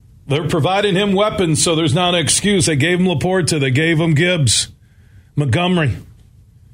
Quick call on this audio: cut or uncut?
uncut